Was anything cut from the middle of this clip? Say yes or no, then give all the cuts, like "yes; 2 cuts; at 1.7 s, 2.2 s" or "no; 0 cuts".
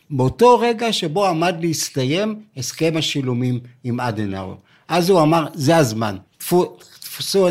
yes; 1 cut; at 6.3 s